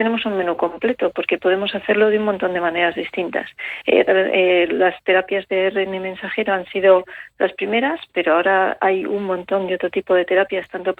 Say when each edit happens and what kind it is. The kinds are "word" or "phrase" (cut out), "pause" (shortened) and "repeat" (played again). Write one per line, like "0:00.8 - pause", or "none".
none